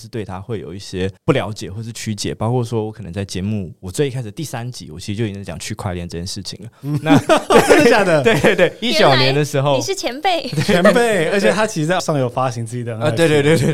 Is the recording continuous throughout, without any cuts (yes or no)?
no